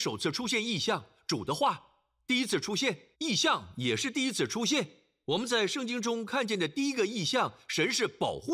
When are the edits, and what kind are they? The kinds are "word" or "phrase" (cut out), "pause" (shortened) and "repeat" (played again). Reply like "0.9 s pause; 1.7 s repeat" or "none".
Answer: 3.1 s pause